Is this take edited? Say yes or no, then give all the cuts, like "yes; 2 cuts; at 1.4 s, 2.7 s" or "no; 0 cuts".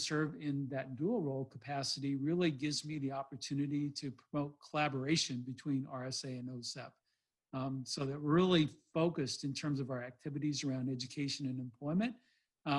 no; 0 cuts